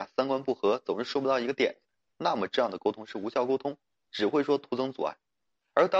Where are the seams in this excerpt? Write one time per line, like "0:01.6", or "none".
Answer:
none